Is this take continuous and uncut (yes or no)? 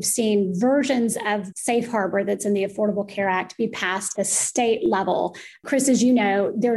no